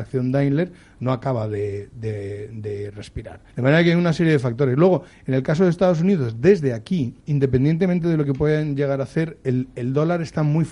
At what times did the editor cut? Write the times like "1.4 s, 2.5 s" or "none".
3.5 s, 7.2 s